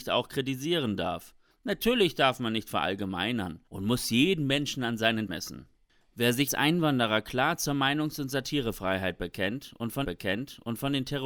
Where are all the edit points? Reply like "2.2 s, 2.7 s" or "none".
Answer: 1.5 s, 3.7 s, 5.3 s, 6.5 s, 10.0 s